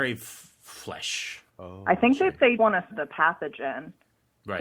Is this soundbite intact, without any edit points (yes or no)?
no